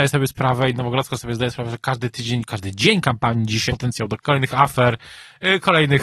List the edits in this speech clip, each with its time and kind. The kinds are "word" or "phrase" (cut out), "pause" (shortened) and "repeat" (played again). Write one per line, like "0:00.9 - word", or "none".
0:03.7 - phrase
0:04.2 - word

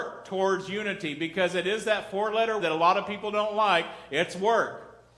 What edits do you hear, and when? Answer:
0:02.6 - word

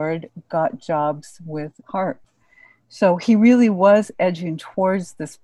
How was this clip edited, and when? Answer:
0:01.8 - pause

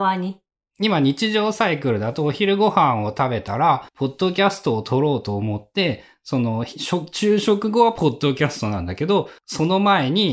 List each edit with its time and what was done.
0:03.9 - pause
0:09.4 - pause

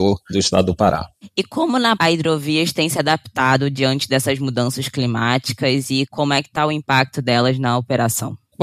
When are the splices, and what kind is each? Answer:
0:02.0 - word

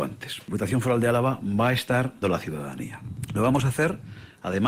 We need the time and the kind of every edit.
0:02.2 - word

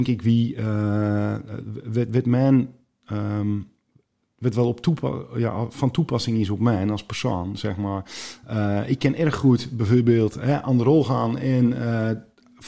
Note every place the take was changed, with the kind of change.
none

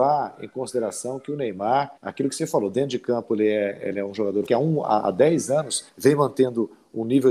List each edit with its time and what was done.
0:02.0 - pause
0:04.5 - phrase
0:05.9 - pause

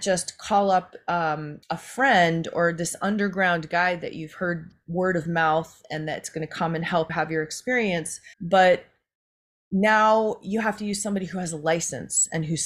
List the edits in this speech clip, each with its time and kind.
0:01.6 - pause
0:07.1 - word
0:08.3 - pause

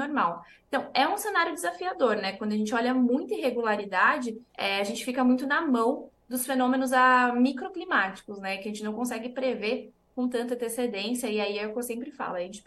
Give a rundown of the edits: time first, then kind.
0:04.5 - pause

